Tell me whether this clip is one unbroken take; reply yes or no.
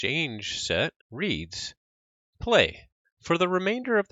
no